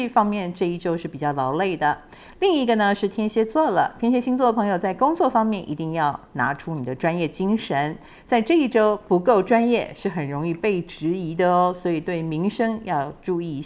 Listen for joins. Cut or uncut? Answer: uncut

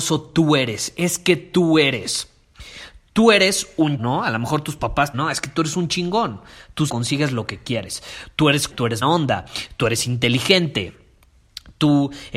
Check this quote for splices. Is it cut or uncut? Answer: cut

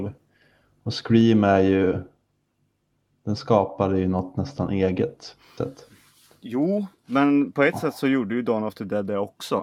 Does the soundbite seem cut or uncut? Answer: cut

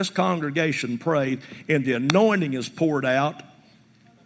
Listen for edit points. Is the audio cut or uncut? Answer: uncut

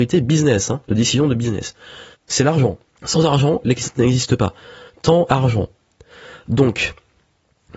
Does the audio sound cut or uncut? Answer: cut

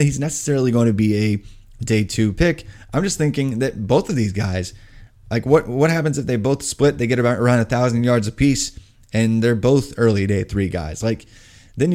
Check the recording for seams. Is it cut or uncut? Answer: uncut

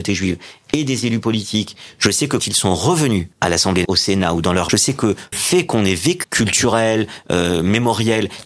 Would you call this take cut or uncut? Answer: cut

